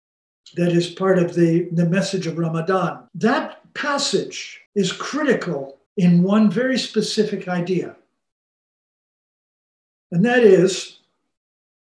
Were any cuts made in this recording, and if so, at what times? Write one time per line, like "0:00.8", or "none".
0:03.1
0:04.7
0:05.9